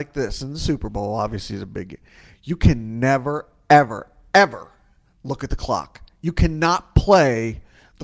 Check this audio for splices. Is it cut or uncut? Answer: uncut